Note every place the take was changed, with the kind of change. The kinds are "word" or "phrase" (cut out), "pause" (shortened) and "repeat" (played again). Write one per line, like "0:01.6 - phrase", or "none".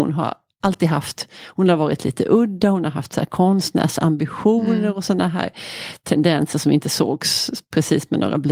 none